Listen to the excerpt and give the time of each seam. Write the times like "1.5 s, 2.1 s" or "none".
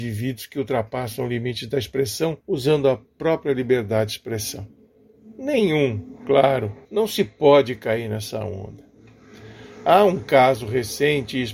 2.4 s, 6.8 s